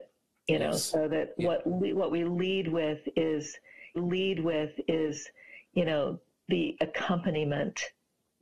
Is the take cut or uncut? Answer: cut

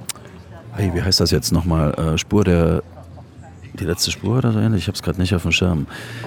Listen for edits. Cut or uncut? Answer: uncut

